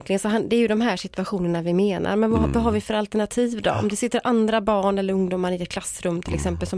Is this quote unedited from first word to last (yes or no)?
yes